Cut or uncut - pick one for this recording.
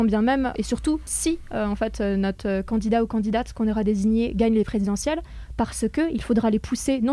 uncut